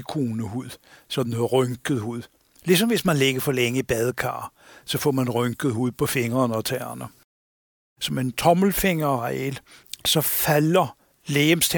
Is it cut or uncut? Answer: uncut